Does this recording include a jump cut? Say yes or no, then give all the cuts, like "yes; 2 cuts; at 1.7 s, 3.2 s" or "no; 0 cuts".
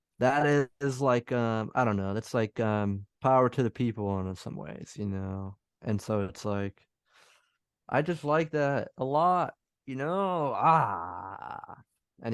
yes; 1 cut; at 3.1 s